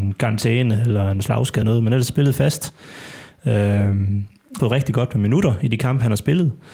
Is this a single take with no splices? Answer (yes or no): no